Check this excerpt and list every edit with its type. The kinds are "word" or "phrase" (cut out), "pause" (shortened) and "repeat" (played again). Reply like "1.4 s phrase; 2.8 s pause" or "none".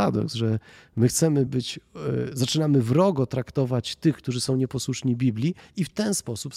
none